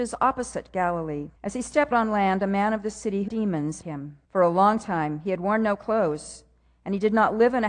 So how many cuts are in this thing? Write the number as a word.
five